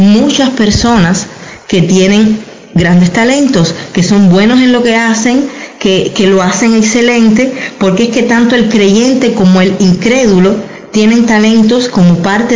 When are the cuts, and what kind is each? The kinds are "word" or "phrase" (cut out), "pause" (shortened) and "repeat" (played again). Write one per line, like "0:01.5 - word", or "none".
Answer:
none